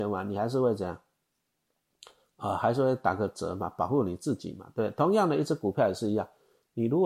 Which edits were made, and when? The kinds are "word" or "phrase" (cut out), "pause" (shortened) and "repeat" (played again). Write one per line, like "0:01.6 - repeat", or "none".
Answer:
none